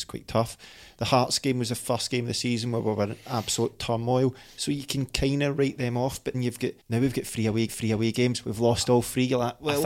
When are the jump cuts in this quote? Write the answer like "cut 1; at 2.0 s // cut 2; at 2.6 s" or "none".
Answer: cut 1; at 6.3 s // cut 2; at 6.8 s // cut 3; at 7.7 s